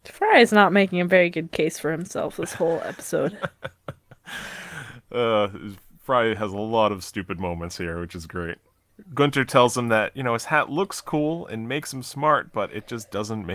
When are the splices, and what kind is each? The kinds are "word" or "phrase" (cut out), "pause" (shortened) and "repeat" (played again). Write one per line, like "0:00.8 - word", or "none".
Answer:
none